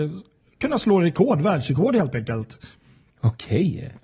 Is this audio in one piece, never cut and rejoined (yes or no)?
yes